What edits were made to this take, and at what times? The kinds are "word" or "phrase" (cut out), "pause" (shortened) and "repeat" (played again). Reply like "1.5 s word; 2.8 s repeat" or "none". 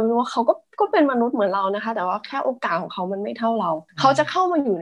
3.9 s pause